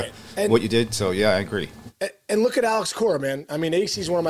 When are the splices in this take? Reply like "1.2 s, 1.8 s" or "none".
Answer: none